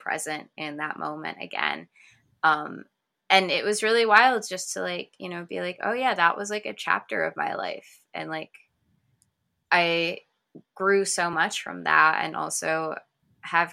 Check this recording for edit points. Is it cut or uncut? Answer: uncut